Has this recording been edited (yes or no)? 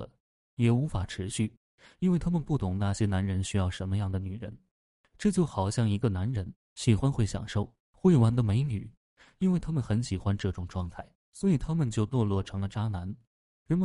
no